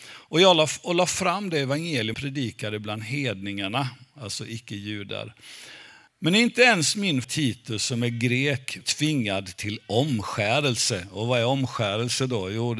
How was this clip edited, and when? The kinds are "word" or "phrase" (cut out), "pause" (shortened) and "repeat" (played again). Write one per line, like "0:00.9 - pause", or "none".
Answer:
0:02.1 - word
0:06.1 - pause
0:07.2 - word
0:08.8 - word